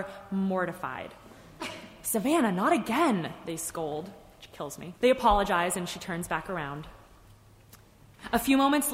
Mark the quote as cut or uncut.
cut